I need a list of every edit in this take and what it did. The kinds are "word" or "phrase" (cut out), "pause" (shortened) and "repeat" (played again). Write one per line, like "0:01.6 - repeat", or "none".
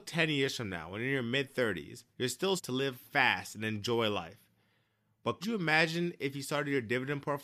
0:02.1 - pause
0:02.6 - phrase
0:02.9 - word
0:05.4 - word